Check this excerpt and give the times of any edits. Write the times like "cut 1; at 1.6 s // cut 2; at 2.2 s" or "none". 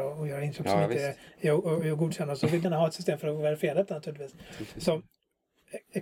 cut 1; at 2.6 s